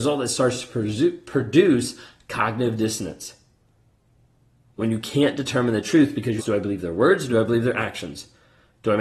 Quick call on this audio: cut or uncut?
cut